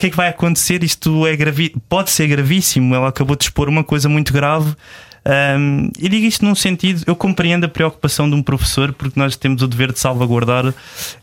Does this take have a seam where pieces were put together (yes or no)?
no